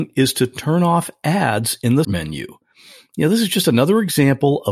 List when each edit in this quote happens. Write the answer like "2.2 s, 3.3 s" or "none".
2.0 s